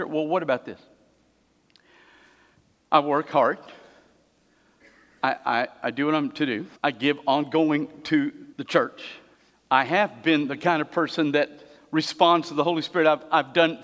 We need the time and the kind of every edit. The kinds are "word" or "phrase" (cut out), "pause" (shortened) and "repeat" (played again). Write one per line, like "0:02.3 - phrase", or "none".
0:06.8 - pause
0:08.5 - pause
0:09.3 - pause